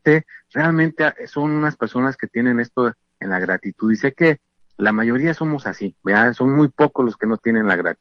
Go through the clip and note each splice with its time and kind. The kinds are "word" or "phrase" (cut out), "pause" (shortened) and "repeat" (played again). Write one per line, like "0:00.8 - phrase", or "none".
none